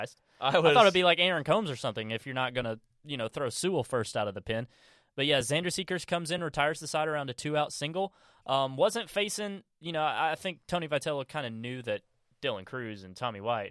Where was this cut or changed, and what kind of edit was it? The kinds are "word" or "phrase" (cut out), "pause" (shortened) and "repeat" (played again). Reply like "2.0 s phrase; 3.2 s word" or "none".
none